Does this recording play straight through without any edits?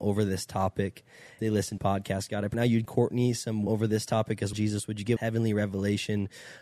no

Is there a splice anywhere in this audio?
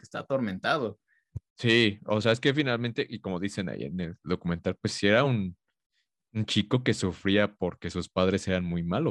no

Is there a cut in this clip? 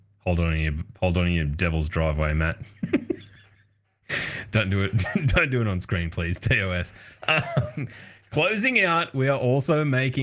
yes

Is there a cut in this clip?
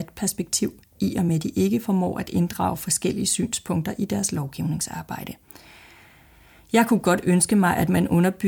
no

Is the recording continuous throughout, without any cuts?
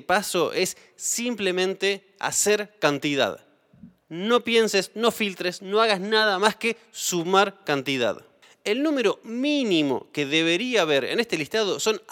yes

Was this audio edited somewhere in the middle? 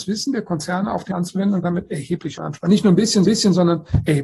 yes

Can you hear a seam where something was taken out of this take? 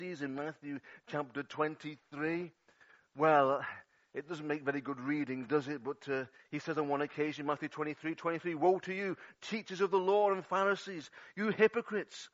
no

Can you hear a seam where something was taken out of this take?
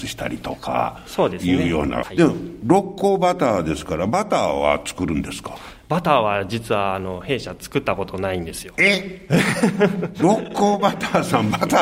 yes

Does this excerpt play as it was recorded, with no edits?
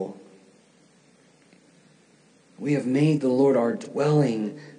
yes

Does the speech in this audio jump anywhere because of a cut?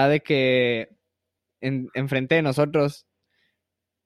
no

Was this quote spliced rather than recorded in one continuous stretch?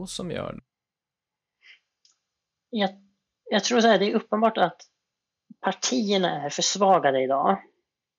no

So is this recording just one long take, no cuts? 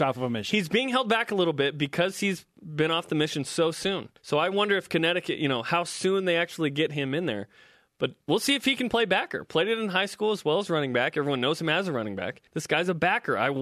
no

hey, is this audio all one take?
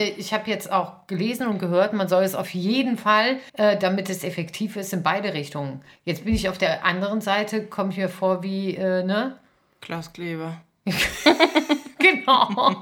no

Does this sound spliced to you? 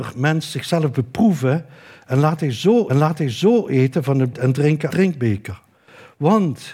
yes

